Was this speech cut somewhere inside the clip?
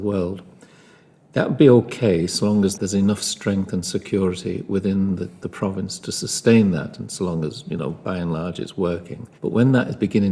yes; 1 cut; at 9.4 s

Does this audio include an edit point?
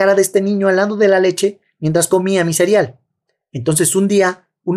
no; 0 cuts

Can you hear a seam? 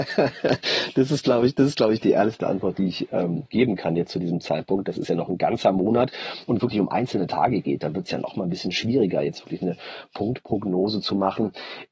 yes; 1 cut; at 6.6 s

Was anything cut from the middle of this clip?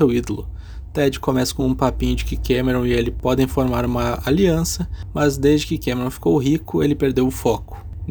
no; 0 cuts

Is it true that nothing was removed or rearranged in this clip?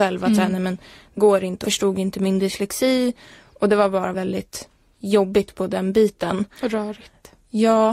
no; 3 cuts; at 1.2 s, 1.6 s, 4.1 s

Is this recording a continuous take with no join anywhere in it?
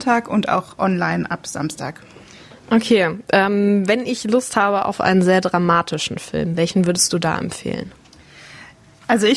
yes; 0 cuts

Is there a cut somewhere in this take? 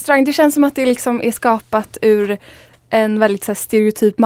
no; 0 cuts

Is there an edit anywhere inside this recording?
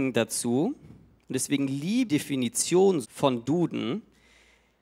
yes; 3 cuts; at 2.1 s, 3.0 s, 3.4 s

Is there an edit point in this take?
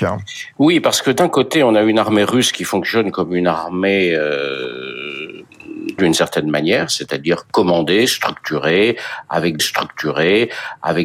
yes; 2 cuts; at 6.0 s, 9.6 s

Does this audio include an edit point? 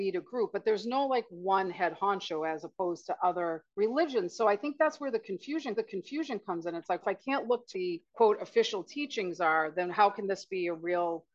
yes; 5 cuts; at 3.7 s, 5.8 s, 7.0 s, 7.7 s, 8.1 s

